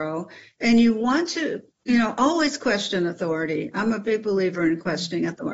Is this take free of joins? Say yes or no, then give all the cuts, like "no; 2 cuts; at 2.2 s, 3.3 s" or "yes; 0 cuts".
yes; 0 cuts